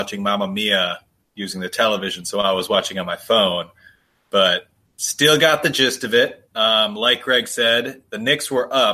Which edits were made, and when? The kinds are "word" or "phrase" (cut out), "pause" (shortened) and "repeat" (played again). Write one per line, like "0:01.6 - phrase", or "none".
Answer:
none